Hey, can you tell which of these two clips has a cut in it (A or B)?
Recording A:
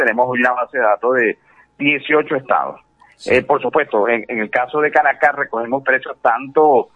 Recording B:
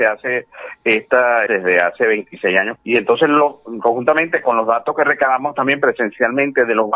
B